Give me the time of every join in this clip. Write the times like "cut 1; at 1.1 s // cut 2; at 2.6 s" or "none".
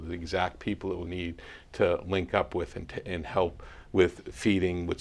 cut 1; at 1.1 s